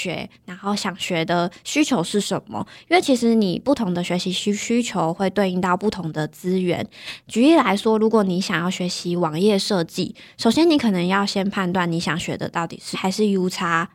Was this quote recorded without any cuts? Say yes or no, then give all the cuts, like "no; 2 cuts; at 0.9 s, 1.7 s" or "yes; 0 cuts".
no; 1 cut; at 12.9 s